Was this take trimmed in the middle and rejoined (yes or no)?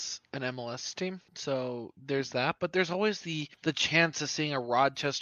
yes